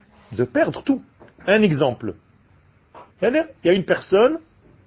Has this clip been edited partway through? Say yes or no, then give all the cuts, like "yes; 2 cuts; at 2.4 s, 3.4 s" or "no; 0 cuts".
yes; 2 cuts; at 1.1 s, 3.1 s